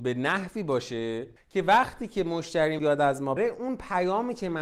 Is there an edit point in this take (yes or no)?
yes